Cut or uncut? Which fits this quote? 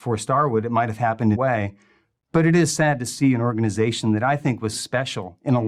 cut